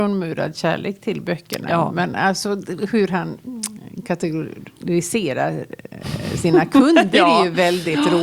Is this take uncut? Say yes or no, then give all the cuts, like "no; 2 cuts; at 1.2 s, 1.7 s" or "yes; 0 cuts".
yes; 0 cuts